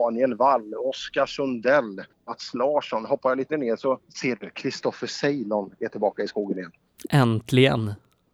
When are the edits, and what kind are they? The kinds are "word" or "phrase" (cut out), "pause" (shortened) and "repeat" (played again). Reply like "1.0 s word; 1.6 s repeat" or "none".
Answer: 2.1 s pause; 3.5 s word; 4.1 s pause

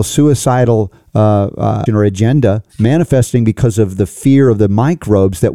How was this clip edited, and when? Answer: 1.9 s word; 2.7 s pause

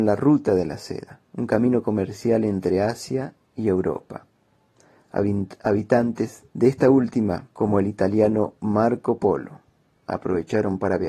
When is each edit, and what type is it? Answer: 1.2 s pause; 6.5 s pause; 7.5 s pause

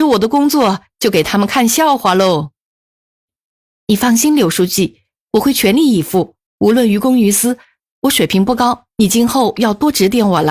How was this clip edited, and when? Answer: 6.5 s pause

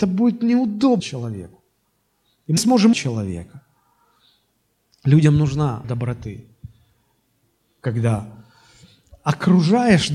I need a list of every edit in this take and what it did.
1.0 s word; 2.6 s word; 2.9 s word; 5.8 s word

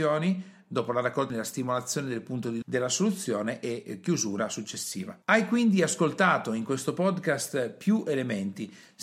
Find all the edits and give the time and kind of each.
1.3 s phrase; 2.6 s phrase; 5.2 s pause

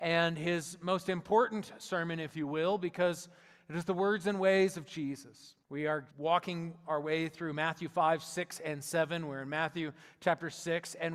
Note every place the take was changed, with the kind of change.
5.6 s pause; 6.1 s pause

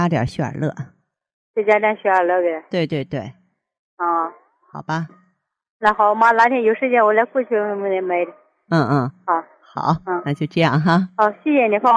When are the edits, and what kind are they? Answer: none

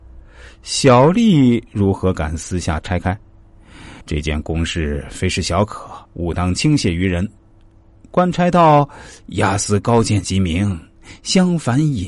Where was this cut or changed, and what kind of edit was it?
4.0 s pause; 6.1 s pause

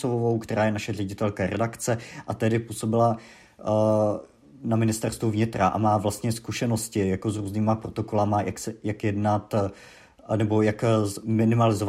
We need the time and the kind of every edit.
none

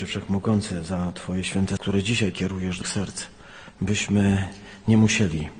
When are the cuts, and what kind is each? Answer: 1.8 s word; 2.3 s word; 2.8 s word

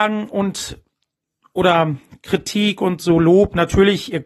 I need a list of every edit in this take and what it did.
none

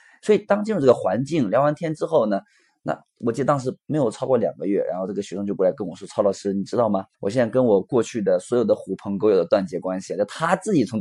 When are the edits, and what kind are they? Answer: 7.1 s pause

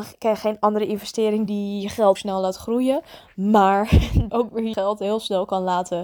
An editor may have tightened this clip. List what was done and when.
1.5 s word; 2.1 s word; 4.3 s word; 4.7 s word

